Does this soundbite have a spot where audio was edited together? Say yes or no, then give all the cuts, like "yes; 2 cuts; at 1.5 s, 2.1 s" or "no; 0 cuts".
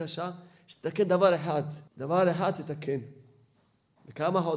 yes; 1 cut; at 1.9 s